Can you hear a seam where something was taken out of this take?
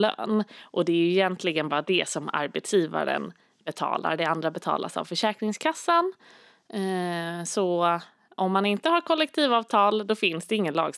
no; 0 cuts

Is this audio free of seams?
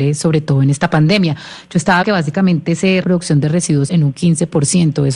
no; 3 cuts; at 2.0 s, 3.0 s, 3.9 s

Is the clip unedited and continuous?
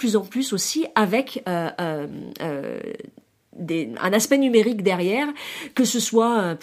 yes; 0 cuts

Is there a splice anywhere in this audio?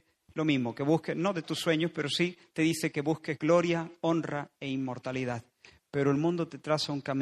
no; 0 cuts

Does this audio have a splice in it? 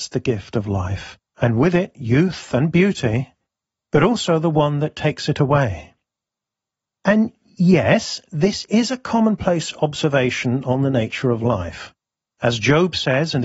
yes; 1 cut; at 1.3 s

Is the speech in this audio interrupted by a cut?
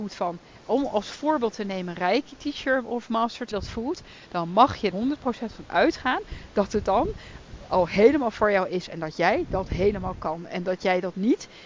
yes; 2 cuts; at 3.5 s, 4.9 s

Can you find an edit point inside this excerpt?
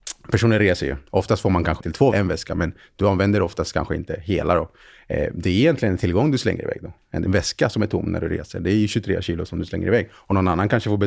yes; 2 cuts; at 1.8 s, 2.1 s

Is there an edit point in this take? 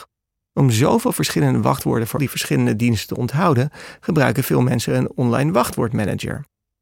yes; 1 cut; at 2.2 s

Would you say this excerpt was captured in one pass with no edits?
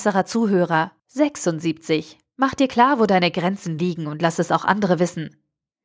no; 1 cut; at 1.0 s

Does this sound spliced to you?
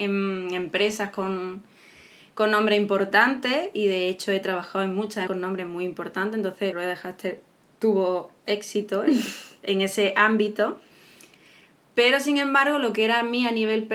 yes; 2 cuts; at 5.3 s, 6.7 s

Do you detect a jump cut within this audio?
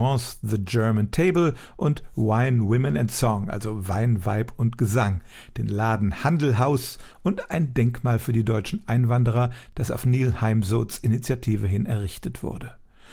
no; 0 cuts

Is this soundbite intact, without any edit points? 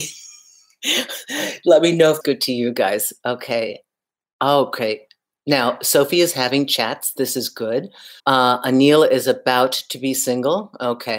no; 2 cuts; at 2.2 s, 8.2 s

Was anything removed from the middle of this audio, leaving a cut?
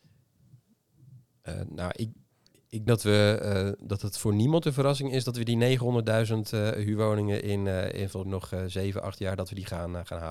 yes; 2 cuts; at 2.9 s, 8.2 s

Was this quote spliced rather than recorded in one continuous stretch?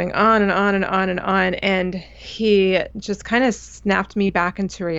no; 0 cuts

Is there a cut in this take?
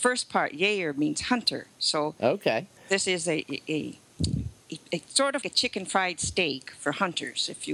yes; 3 cuts; at 2.8 s, 4.6 s, 5.4 s

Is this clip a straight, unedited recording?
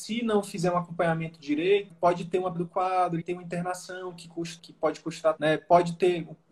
no; 5 cuts; at 1.9 s, 2.5 s, 3.2 s, 4.6 s, 5.4 s

